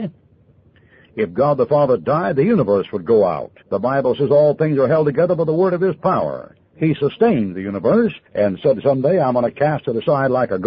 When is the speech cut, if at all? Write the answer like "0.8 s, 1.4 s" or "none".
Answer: 3.6 s, 6.7 s, 8.3 s